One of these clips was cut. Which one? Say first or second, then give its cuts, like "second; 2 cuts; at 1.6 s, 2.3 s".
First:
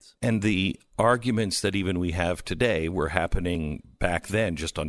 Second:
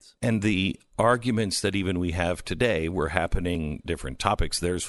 second; 1 cut; at 3.9 s